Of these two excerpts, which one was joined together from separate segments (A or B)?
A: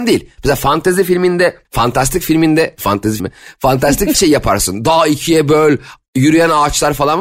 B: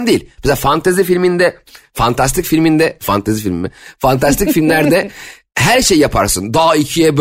A